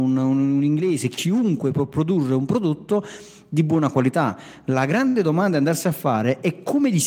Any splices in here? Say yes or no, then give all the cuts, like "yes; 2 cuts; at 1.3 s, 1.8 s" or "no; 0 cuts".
no; 0 cuts